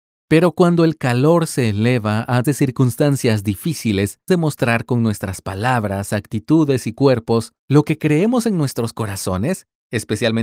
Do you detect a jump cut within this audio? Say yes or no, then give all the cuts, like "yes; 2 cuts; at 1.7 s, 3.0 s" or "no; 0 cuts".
yes; 3 cuts; at 2.4 s, 4.3 s, 7.6 s